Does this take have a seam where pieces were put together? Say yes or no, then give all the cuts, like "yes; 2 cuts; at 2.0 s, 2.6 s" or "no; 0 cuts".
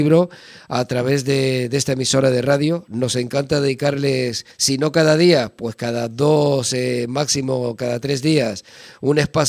yes; 1 cut; at 4.5 s